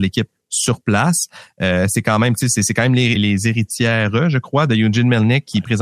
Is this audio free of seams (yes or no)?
no